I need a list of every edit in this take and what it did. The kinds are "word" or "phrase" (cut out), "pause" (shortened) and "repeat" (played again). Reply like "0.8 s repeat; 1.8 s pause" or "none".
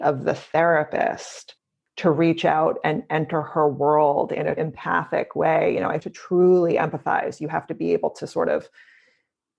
4.6 s word; 6.0 s word